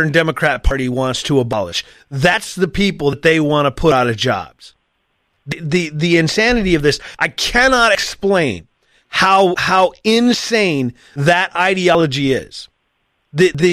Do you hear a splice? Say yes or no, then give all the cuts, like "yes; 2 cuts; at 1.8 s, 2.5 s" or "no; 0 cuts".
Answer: no; 0 cuts